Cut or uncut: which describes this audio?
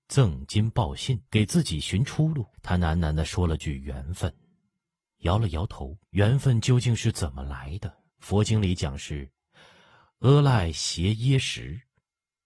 cut